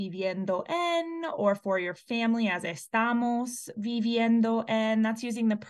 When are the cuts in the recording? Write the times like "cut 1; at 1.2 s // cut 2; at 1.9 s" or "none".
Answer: none

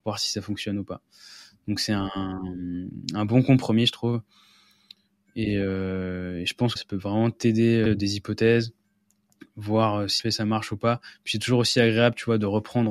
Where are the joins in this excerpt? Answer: cut 1; at 6.8 s // cut 2; at 7.9 s // cut 3; at 10.2 s

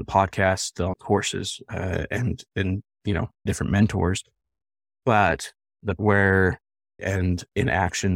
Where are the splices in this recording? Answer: cut 1; at 0.9 s // cut 2; at 3.5 s // cut 3; at 6.0 s // cut 4; at 7.0 s

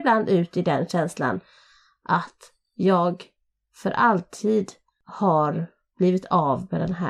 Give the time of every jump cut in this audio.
none

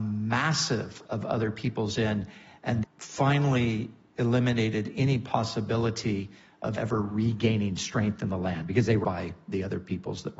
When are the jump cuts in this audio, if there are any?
cut 1; at 1.1 s // cut 2; at 2.8 s // cut 3; at 6.8 s // cut 4; at 9.0 s

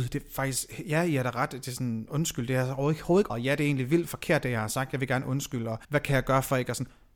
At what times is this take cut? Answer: cut 1; at 3.3 s // cut 2; at 5.8 s

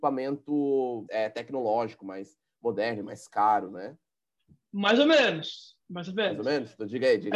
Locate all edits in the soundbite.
cut 1; at 1.1 s

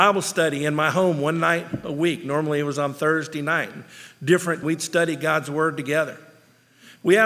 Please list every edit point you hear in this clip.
cut 1; at 4.6 s

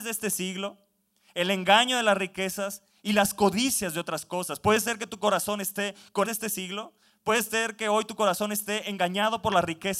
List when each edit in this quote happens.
cut 1; at 6.2 s

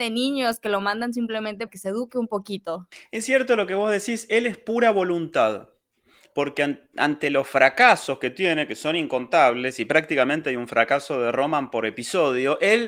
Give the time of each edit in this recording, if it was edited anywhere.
cut 1; at 1.7 s

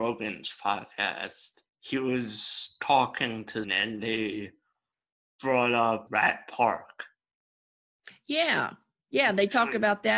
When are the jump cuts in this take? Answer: cut 1; at 1.7 s // cut 2; at 3.6 s // cut 3; at 6.1 s

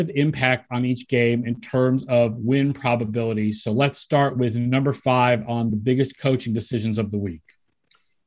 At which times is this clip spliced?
none

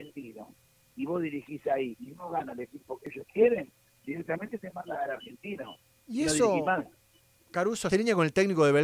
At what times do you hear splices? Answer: cut 1; at 7.9 s

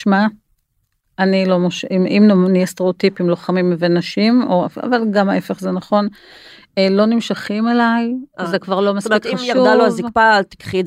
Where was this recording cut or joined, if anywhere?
none

